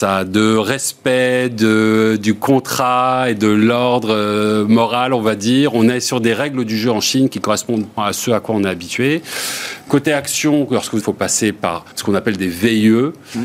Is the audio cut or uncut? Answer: cut